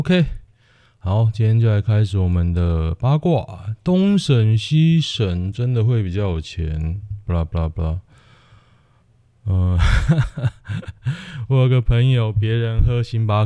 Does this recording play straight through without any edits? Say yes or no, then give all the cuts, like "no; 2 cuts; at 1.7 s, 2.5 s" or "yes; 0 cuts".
yes; 0 cuts